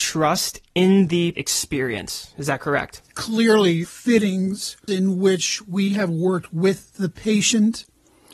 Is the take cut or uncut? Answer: cut